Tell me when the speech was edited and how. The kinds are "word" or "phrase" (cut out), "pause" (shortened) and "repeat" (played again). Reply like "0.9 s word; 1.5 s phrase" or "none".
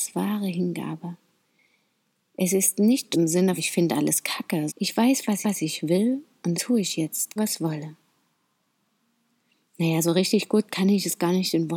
3.1 s word; 3.6 s word; 4.7 s phrase; 5.4 s repeat; 6.5 s word; 7.4 s word